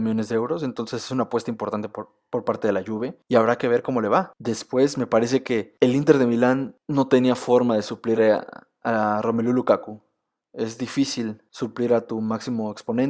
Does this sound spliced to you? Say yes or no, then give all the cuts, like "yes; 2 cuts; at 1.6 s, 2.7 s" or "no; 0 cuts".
no; 0 cuts